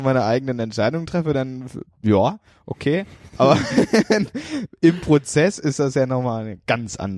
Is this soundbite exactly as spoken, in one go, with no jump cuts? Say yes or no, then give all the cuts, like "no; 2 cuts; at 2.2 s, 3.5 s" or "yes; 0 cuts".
yes; 0 cuts